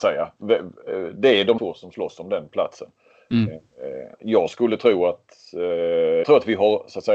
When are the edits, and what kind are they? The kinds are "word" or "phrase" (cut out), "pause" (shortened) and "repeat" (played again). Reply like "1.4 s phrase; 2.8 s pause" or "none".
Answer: 1.6 s word; 4.1 s pause; 6.2 s word